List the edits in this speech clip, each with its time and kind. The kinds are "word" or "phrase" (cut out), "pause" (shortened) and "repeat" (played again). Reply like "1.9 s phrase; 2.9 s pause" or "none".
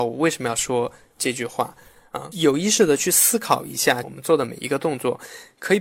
2.3 s word